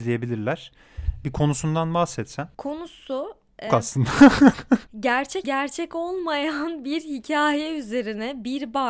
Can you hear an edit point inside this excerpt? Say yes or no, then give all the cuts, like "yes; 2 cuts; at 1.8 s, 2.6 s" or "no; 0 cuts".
yes; 2 cuts; at 3.7 s, 5.4 s